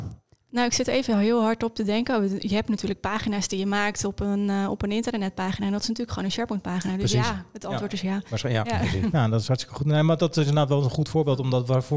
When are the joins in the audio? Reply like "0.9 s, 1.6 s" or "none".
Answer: none